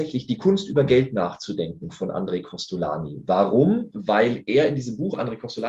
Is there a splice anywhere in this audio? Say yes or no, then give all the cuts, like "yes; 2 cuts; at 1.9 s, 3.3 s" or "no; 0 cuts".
no; 0 cuts